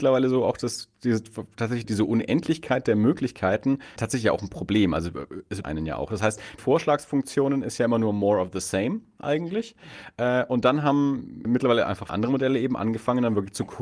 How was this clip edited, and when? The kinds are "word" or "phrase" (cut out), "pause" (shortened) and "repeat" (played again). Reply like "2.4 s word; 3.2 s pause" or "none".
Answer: 1.8 s word; 4.0 s word; 5.6 s word; 6.6 s word; 11.5 s word; 12.1 s word